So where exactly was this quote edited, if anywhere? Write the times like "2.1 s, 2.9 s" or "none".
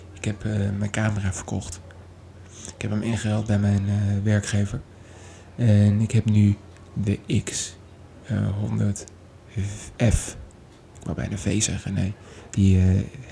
none